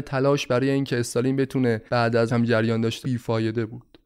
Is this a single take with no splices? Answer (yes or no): no